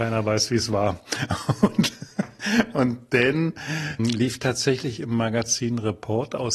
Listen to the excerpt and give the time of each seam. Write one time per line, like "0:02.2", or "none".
0:04.0